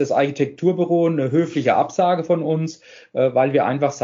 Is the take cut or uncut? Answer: uncut